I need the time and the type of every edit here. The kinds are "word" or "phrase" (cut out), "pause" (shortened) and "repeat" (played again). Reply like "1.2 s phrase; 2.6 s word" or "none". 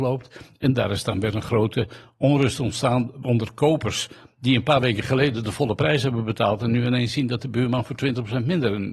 none